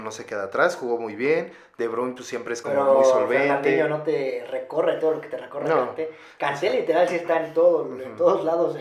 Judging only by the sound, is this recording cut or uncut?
uncut